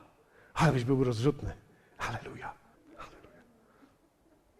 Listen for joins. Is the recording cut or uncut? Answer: cut